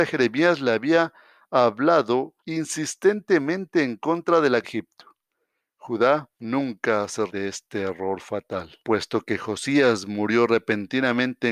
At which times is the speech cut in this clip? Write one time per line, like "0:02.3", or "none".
0:02.4
0:04.6
0:06.3
0:07.3
0:08.8